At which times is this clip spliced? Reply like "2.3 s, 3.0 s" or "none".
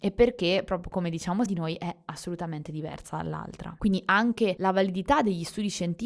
1.5 s